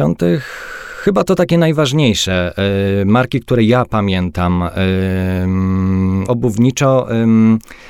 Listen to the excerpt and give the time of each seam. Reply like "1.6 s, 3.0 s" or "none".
6.3 s